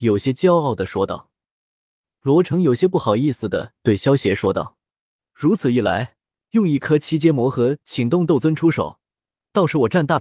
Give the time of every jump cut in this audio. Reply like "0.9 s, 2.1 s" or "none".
none